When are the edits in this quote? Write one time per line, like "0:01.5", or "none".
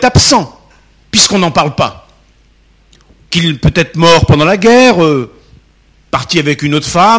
none